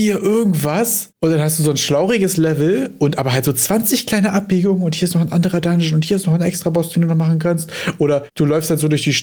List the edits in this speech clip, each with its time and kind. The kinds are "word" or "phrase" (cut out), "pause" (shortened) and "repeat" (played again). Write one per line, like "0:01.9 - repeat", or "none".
none